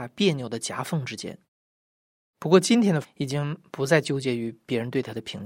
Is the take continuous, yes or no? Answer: no